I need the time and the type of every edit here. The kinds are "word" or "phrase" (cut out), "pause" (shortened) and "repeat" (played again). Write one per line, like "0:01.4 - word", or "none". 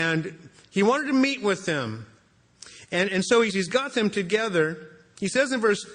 0:03.5 - phrase